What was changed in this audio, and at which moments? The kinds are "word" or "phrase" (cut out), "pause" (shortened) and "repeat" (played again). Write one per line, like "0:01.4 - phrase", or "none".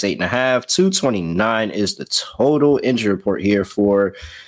none